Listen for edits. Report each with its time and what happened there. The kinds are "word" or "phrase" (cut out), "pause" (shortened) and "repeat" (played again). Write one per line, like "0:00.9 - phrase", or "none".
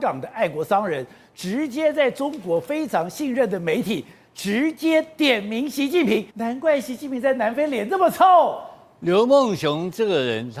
0:06.3 - pause